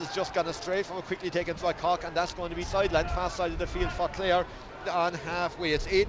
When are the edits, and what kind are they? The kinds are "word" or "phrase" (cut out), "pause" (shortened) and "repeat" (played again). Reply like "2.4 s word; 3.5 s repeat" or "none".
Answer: 1.6 s word; 2.6 s word; 4.8 s word